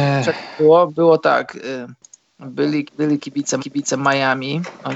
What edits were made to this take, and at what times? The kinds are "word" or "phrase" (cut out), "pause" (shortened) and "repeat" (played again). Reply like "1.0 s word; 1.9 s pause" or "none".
2.8 s word; 3.6 s repeat